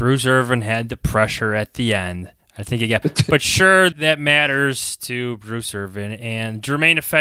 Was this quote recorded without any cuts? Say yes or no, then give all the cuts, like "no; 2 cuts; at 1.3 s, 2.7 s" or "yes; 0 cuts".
no; 3 cuts; at 2.4 s, 3.0 s, 3.9 s